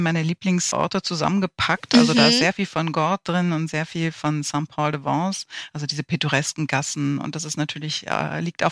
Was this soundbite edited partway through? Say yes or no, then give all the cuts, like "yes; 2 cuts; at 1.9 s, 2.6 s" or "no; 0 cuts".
no; 0 cuts